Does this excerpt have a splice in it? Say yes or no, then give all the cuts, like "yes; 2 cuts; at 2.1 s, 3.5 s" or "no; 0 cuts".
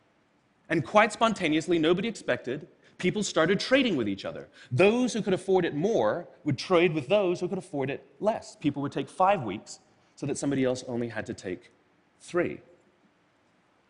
no; 0 cuts